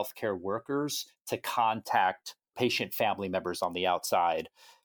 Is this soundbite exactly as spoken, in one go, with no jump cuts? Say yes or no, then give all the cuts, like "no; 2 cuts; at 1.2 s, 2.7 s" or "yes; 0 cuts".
yes; 0 cuts